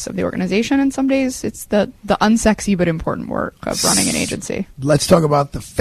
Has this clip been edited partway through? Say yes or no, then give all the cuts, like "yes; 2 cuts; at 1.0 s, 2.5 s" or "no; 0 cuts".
no; 0 cuts